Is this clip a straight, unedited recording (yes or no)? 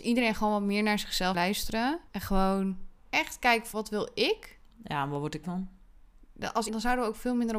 no